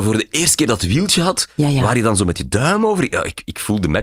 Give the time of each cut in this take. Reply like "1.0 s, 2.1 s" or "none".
none